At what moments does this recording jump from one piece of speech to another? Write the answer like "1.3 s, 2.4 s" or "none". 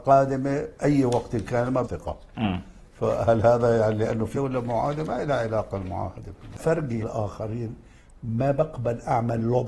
1.8 s, 4.3 s, 6.6 s, 7.0 s